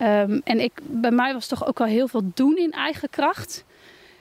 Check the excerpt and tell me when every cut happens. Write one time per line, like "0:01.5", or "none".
none